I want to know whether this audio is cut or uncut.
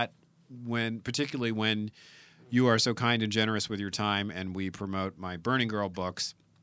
uncut